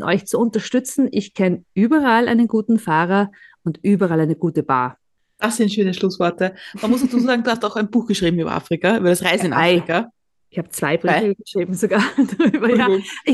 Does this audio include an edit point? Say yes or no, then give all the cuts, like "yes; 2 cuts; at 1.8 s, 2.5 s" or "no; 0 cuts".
no; 0 cuts